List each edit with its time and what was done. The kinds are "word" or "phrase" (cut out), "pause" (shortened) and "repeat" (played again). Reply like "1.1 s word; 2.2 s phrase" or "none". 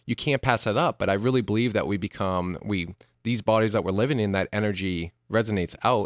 none